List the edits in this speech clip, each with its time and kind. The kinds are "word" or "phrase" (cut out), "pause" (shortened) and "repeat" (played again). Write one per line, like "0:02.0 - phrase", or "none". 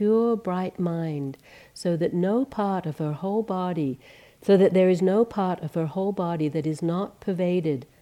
none